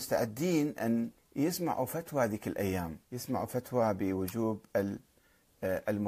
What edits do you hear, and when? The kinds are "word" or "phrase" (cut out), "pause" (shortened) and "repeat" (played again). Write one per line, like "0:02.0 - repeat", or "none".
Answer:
0:01.2 - pause
0:03.0 - pause

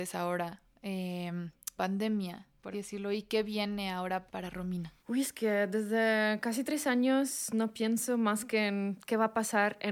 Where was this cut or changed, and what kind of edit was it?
0:01.8 - word
0:02.7 - word
0:04.3 - word
0:05.0 - pause

